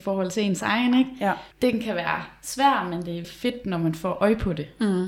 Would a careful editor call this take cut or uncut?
cut